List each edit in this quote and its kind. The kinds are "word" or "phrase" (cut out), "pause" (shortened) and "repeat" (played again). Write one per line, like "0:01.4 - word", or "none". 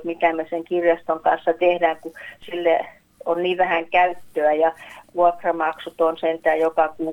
none